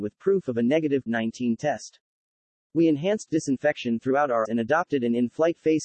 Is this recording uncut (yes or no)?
no